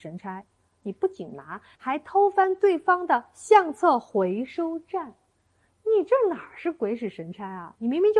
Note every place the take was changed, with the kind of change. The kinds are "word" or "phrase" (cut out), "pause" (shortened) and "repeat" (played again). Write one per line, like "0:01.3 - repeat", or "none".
none